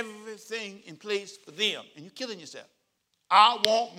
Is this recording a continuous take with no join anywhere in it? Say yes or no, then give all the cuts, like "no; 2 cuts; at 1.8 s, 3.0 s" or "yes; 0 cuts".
no; 1 cut; at 3.0 s